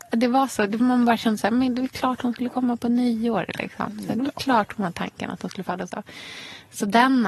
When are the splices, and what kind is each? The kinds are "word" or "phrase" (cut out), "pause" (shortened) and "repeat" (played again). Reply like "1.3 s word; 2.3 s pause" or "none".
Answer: none